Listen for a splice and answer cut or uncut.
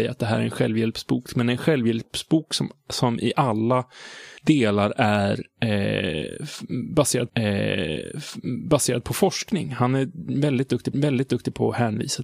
cut